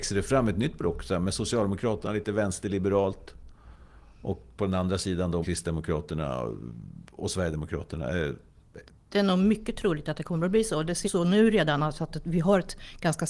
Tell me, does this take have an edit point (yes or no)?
yes